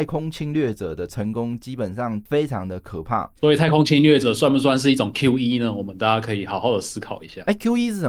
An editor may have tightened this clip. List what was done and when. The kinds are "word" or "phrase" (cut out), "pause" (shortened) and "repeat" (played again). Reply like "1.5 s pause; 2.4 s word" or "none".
none